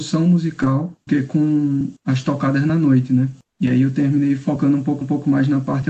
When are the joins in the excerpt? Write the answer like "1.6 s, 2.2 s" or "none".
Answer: 1.1 s, 2.0 s, 5.0 s